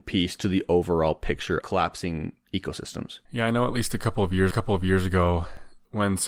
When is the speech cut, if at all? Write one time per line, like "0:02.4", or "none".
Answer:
0:01.6
0:03.2
0:04.5